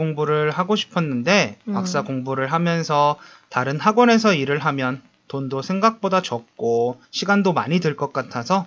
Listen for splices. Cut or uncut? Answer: cut